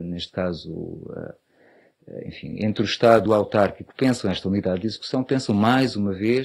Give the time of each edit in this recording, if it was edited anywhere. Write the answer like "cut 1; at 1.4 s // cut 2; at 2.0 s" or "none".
cut 1; at 3.3 s